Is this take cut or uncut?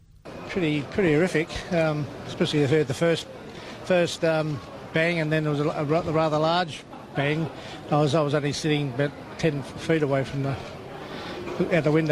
uncut